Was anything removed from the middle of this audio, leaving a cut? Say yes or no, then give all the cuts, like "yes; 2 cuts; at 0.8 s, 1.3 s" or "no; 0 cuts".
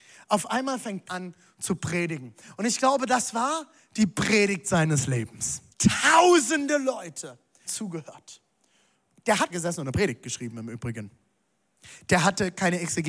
yes; 4 cuts; at 1.1 s, 5.7 s, 7.6 s, 9.5 s